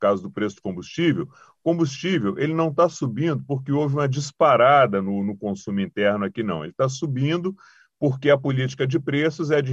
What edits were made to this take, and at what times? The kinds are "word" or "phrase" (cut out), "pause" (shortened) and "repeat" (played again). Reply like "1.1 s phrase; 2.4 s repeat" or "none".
none